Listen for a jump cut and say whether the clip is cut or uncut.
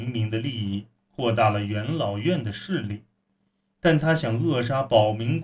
uncut